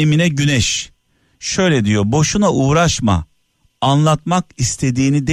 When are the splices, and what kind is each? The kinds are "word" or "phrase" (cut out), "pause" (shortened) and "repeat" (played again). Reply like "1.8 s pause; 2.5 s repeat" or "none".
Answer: none